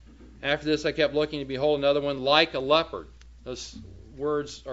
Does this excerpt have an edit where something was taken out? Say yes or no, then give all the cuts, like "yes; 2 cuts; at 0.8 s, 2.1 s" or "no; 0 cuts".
no; 0 cuts